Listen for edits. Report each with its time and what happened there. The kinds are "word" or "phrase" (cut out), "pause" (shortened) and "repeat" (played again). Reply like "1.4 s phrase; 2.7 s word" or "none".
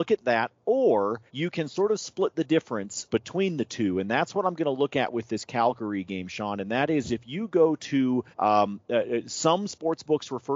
1.3 s pause; 3.1 s word; 8.3 s pause